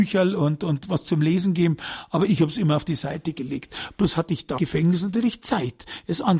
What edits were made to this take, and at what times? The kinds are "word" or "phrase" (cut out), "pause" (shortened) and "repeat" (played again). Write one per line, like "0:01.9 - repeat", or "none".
0:04.6 - word